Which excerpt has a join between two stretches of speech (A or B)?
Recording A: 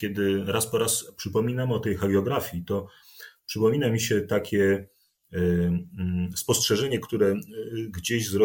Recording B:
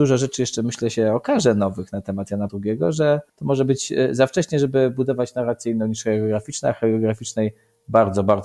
B